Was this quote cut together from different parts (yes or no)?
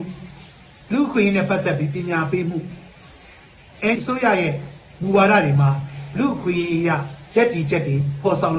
yes